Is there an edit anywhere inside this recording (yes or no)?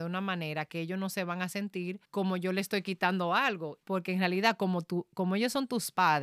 yes